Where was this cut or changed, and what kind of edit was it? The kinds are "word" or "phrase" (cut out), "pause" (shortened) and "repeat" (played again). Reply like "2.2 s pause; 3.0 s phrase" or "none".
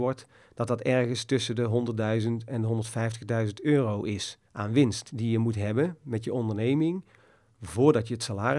4.4 s pause